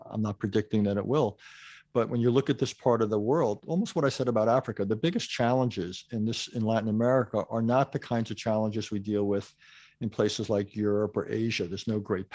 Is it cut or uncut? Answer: uncut